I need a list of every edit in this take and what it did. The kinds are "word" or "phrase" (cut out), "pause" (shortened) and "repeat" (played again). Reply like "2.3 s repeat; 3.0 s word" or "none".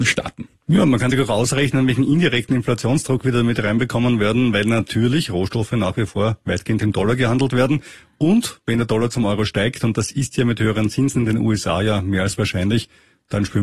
none